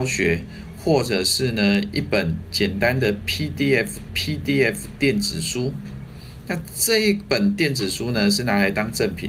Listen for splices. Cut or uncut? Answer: cut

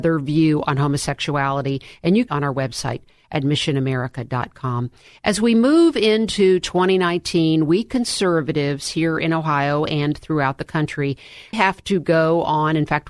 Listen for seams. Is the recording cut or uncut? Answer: cut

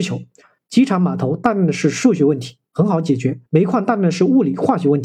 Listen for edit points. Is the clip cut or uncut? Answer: cut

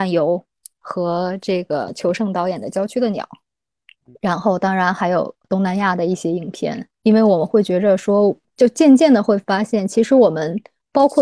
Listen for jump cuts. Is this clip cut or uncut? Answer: cut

